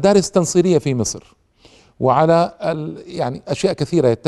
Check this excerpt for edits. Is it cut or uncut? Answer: uncut